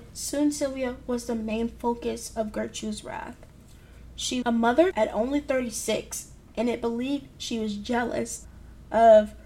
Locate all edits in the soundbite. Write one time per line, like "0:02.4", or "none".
0:04.4
0:04.9